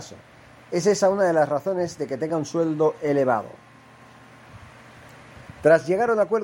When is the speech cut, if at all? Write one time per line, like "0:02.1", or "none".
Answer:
none